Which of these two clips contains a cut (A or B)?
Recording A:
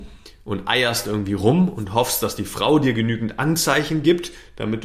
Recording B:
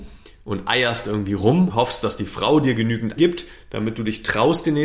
B